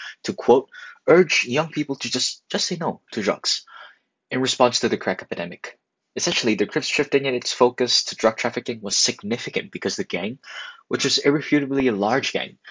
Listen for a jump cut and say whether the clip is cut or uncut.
uncut